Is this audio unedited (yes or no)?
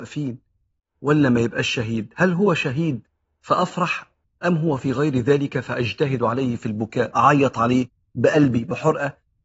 yes